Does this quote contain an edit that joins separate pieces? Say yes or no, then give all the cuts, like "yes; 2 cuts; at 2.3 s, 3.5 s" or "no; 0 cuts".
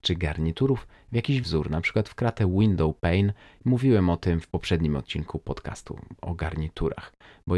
yes; 1 cut; at 1.4 s